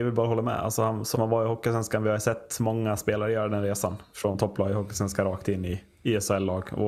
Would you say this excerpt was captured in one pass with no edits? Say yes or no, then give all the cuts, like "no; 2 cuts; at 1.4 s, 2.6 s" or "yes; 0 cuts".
no; 1 cut; at 1.1 s